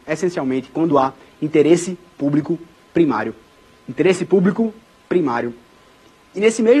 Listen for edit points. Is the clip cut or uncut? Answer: uncut